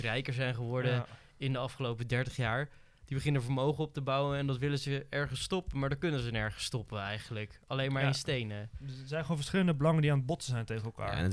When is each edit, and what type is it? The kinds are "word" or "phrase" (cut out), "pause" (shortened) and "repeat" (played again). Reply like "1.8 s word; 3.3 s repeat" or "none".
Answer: none